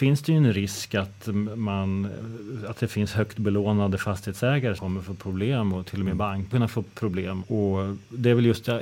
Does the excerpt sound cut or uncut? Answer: cut